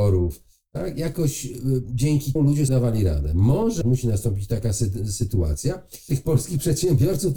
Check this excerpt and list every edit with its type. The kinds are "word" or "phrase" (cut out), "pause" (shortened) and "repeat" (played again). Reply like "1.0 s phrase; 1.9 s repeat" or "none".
2.4 s word; 2.7 s word; 3.8 s word; 6.1 s word